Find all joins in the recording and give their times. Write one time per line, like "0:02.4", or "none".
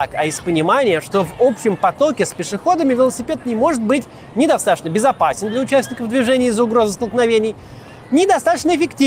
none